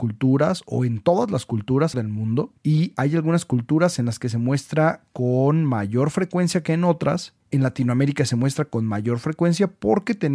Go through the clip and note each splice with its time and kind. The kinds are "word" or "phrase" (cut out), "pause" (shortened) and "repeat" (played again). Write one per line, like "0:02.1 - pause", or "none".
0:01.9 - word
0:02.6 - pause
0:07.4 - pause